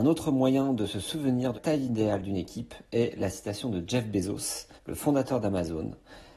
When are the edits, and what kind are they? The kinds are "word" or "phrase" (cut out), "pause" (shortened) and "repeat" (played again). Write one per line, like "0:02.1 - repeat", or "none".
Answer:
0:01.5 - word
0:04.8 - pause